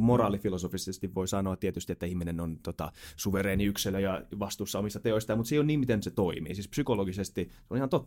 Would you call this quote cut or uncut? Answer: uncut